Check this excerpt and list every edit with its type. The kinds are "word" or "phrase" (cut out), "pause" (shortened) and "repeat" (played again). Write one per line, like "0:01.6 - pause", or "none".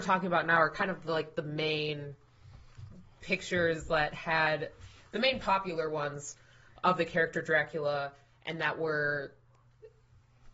none